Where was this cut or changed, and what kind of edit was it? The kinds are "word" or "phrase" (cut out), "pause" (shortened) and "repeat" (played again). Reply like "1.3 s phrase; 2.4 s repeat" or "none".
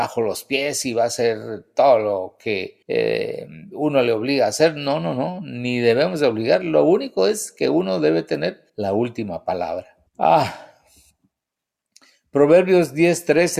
2.8 s pause; 8.7 s pause; 10.1 s pause